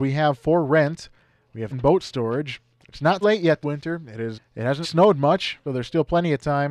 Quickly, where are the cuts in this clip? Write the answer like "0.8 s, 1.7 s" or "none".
1.7 s, 3.2 s, 3.6 s, 4.3 s, 4.8 s, 5.6 s